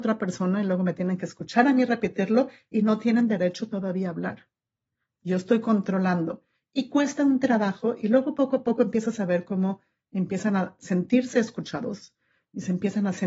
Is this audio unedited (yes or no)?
yes